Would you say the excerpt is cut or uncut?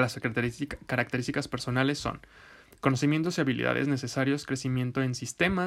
uncut